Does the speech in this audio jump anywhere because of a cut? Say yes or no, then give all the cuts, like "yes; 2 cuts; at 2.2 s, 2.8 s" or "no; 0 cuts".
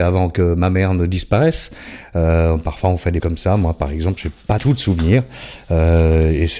yes; 2 cuts; at 3.2 s, 4.6 s